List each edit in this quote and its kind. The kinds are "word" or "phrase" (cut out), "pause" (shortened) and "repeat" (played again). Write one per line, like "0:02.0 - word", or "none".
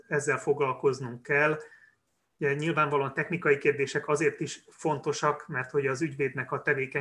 none